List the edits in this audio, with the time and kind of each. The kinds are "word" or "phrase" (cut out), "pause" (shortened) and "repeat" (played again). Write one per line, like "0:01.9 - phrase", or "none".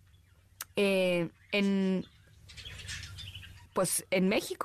0:03.7 - pause